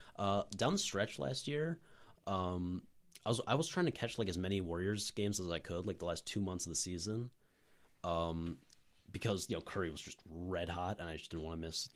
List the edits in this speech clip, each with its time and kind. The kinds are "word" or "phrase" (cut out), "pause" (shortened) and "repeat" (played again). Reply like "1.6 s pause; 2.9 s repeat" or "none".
none